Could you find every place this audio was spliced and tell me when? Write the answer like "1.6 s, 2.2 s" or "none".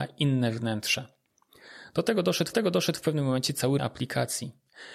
2.5 s, 3.8 s